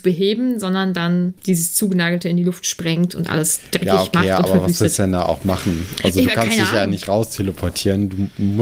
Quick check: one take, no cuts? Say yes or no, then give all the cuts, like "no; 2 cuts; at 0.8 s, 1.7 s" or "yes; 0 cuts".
no; 1 cut; at 1.4 s